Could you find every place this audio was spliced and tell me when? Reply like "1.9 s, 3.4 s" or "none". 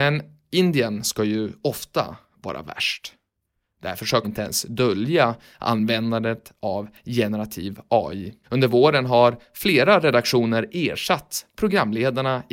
4.2 s, 8.4 s